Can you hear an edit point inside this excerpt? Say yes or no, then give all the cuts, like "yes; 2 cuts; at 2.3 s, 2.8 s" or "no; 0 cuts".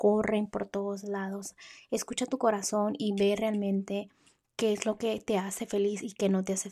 no; 0 cuts